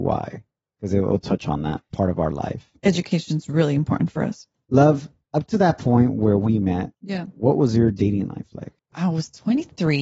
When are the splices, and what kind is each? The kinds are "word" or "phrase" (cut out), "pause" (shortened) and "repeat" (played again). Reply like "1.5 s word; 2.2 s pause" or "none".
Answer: 6.9 s pause; 8.8 s pause

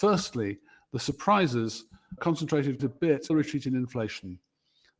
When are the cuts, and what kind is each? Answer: 2.2 s word; 2.8 s word; 3.3 s phrase

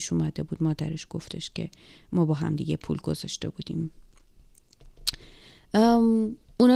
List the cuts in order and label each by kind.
none

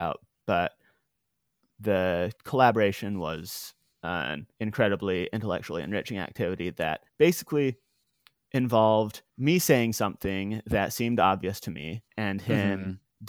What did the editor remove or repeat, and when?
2.4 s pause; 4.5 s pause; 7.1 s pause; 9.3 s pause; 12.1 s pause

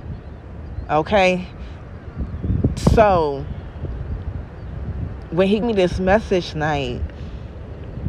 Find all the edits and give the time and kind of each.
5.6 s word; 6.5 s word

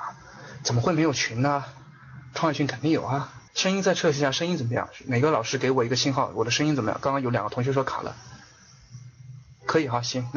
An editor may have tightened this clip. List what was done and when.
3.5 s pause

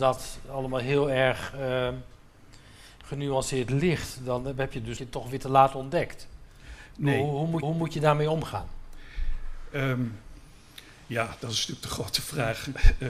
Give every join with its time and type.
5.0 s phrase; 7.6 s repeat

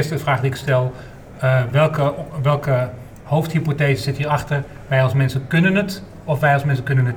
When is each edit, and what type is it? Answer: none

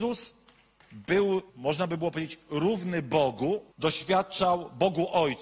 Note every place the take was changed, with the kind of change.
1.5 s pause; 3.7 s pause

